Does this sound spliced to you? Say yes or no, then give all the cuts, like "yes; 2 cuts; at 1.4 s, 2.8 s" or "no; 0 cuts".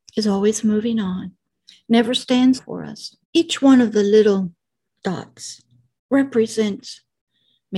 yes; 4 cuts; at 1.5 s, 2.6 s, 3.2 s, 5.8 s